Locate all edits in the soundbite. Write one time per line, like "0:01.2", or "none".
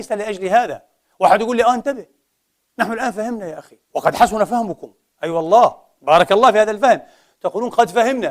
0:03.8